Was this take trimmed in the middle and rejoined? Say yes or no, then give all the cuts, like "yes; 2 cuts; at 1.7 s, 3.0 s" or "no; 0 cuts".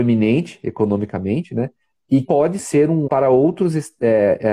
yes; 3 cuts; at 2.2 s, 2.6 s, 3.1 s